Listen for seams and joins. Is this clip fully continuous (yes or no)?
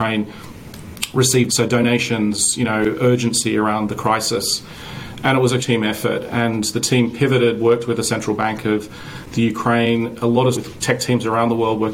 no